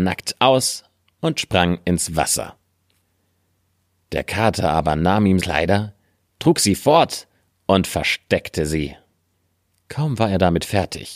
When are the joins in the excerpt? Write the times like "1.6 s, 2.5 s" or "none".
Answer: 5.4 s

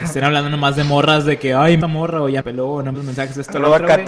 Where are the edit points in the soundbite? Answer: 1.8 s, 2.4 s, 2.9 s

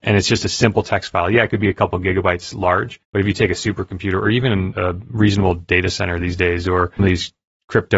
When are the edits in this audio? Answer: 3.0 s, 4.7 s, 7.0 s

